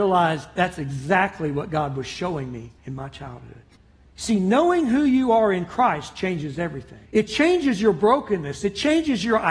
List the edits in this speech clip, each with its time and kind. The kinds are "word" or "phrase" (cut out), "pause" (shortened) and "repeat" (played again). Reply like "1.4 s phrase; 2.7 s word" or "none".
2.8 s pause; 3.8 s pause; 7.1 s pause